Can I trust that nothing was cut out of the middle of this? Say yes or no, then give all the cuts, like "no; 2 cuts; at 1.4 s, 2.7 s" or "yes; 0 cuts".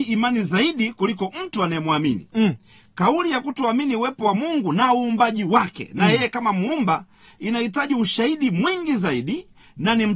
yes; 0 cuts